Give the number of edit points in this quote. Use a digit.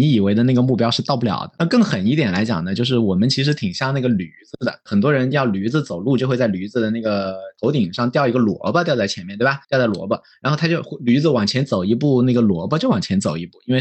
1